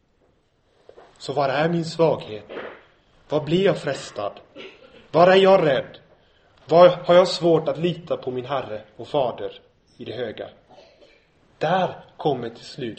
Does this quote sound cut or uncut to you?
uncut